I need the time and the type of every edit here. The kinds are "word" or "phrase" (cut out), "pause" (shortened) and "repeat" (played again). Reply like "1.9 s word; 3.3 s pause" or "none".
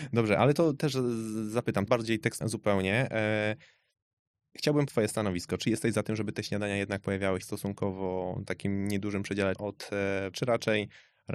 1.9 s word; 2.4 s word; 4.9 s word; 7.4 s word; 9.6 s word; 10.3 s word

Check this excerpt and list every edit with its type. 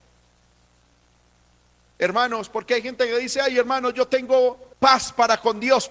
4.7 s pause

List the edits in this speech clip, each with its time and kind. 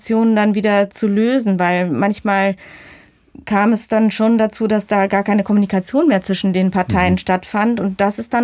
none

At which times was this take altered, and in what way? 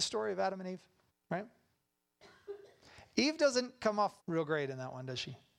1.1 s pause; 4.2 s pause

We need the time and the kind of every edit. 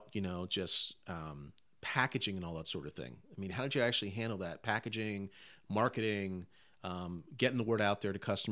none

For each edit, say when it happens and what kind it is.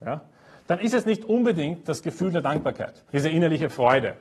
3.1 s pause

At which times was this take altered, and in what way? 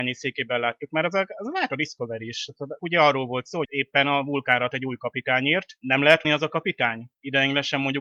2.8 s word; 3.6 s phrase; 4.7 s word; 6.2 s phrase

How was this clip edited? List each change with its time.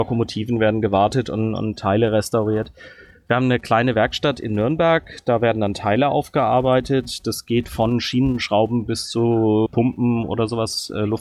9.7 s word

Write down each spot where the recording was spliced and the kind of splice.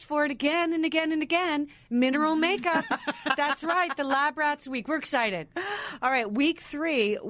none

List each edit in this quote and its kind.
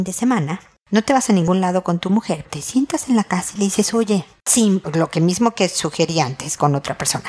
2.4 s word

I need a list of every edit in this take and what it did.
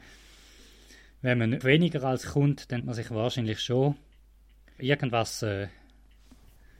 1.6 s word; 2.2 s word; 2.8 s word; 4.8 s word

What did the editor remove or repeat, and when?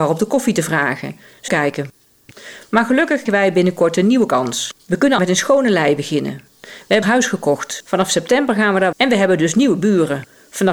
1.5 s phrase; 3.3 s word; 5.2 s phrase; 6.5 s pause; 7.0 s phrase; 8.9 s word

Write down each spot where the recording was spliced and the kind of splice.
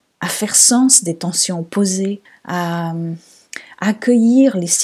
2.2 s pause

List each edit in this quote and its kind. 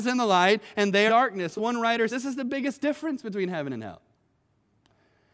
1.1 s phrase; 1.6 s word; 2.1 s word

